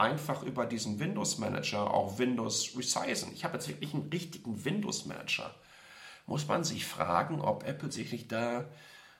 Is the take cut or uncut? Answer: uncut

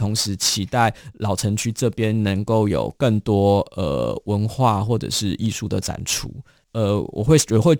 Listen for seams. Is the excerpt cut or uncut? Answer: uncut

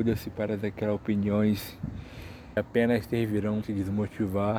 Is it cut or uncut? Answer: cut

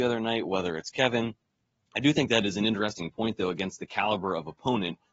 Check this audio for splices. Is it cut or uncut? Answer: uncut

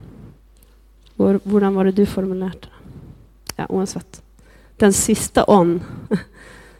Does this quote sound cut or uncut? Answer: uncut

